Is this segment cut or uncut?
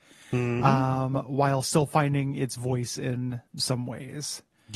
cut